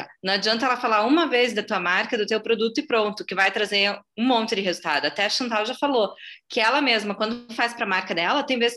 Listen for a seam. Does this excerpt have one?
no; 0 cuts

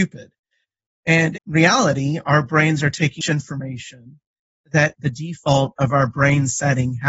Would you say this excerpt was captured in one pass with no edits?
no; 3 cuts; at 1.4 s, 3.2 s, 4.9 s

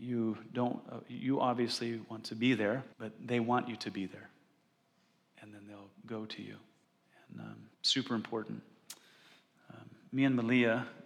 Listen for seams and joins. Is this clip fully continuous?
no; 3 cuts; at 2.9 s, 6.8 s, 7.7 s

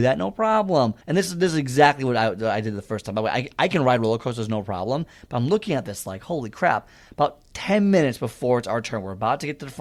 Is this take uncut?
no; 1 cut; at 1.0 s

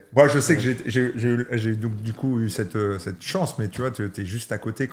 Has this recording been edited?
no; 0 cuts

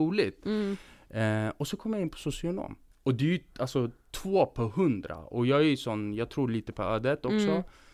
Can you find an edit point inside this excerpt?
yes; 1 cut; at 2.9 s

